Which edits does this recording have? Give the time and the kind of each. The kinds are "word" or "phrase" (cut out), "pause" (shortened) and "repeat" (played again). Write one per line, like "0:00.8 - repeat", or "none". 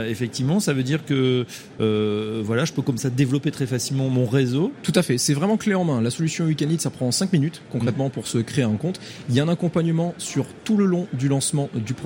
none